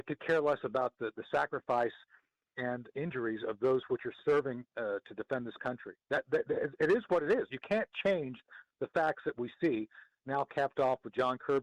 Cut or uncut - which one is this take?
uncut